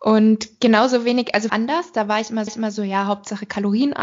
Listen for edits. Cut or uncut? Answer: cut